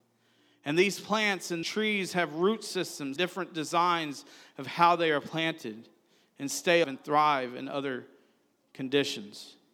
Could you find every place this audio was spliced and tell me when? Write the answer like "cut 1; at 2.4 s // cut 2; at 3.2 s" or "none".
cut 1; at 1.6 s // cut 2; at 3.2 s // cut 3; at 6.8 s

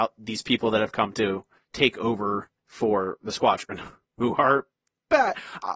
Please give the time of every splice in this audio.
none

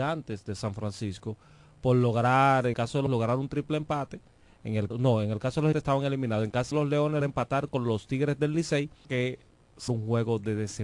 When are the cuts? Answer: cut 1; at 2.7 s // cut 2; at 3.1 s // cut 3; at 4.9 s // cut 4; at 5.7 s // cut 5; at 6.7 s // cut 6; at 7.2 s // cut 7; at 9.0 s // cut 8; at 9.9 s

